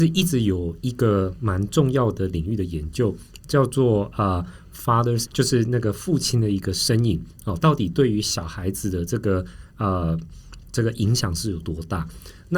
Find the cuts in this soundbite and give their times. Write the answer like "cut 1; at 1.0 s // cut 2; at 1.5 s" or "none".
cut 1; at 5.3 s